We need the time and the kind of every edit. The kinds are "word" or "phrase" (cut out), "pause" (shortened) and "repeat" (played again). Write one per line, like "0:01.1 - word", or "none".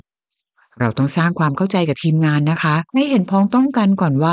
0:02.9 - pause